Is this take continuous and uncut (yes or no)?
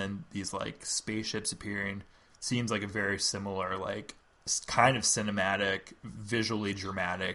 yes